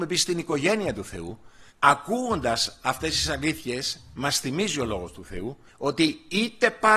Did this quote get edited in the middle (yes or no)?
yes